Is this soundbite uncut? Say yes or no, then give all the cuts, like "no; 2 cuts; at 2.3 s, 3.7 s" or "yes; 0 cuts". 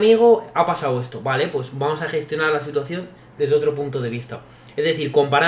yes; 0 cuts